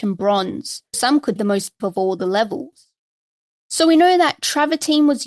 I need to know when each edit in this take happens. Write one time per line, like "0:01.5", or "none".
0:00.9
0:01.4
0:01.8